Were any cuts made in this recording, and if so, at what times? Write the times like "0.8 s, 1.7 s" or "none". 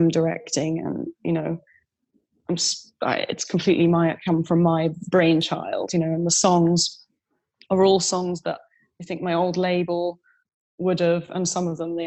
none